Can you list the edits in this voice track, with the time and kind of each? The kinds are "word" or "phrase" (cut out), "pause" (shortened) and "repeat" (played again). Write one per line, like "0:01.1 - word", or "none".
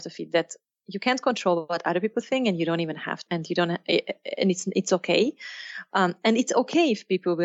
0:03.3 - word